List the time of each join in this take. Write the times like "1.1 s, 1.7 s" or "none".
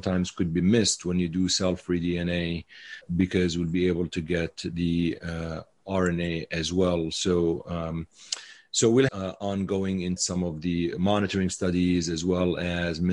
9.1 s, 10.2 s